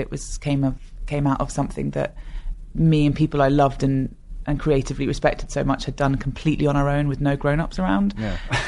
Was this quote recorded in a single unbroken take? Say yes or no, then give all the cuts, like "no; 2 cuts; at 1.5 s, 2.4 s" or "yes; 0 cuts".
yes; 0 cuts